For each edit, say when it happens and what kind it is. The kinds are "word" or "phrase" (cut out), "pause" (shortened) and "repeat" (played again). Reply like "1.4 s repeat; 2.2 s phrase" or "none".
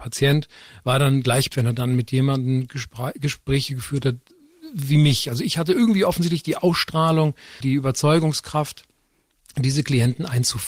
1.5 s word; 7.6 s word